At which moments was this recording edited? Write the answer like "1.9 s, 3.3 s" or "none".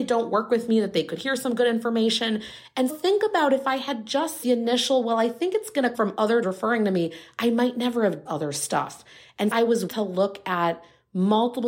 2.9 s, 4.4 s, 5.9 s, 6.4 s, 8.3 s, 9.5 s, 9.9 s